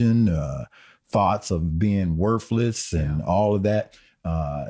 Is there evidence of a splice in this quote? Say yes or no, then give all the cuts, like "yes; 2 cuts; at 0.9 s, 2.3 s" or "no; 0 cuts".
no; 0 cuts